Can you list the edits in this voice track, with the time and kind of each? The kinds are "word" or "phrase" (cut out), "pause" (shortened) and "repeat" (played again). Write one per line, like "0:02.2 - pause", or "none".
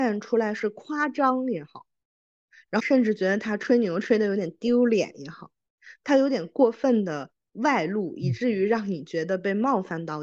none